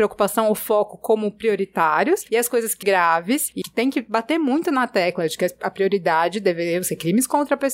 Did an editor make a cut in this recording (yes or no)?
yes